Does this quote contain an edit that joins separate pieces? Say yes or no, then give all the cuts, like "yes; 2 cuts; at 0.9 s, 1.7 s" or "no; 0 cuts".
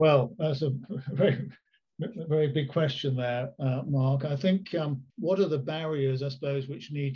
yes; 1 cut; at 5.1 s